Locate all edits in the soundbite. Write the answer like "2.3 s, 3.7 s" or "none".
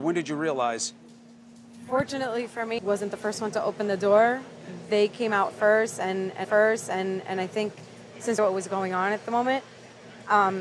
2.8 s, 6.4 s, 8.4 s